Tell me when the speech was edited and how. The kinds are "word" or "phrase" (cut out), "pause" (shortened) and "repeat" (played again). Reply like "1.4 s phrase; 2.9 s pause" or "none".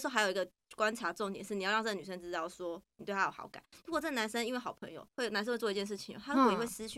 5.1 s pause